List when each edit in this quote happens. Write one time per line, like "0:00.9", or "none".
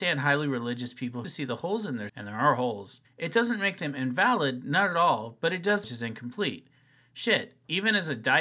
0:01.2
0:02.1
0:03.0
0:05.8

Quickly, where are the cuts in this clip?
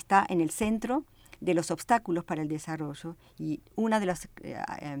0:03.7

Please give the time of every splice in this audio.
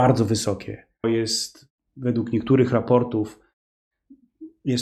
0:01.0

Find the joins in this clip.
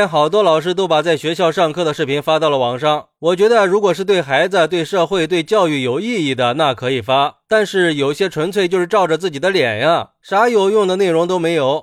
none

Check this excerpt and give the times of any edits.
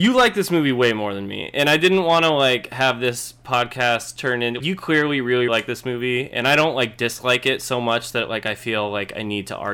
0:04.6
0:05.5

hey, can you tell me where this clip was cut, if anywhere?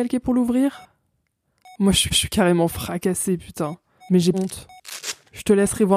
0:02.1
0:04.0
0:04.3

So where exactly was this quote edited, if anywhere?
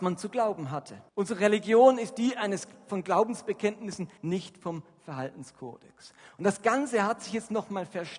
0:01.1
0:04.2

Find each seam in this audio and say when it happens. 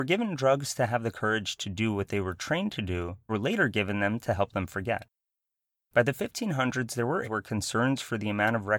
0:03.3
0:07.2

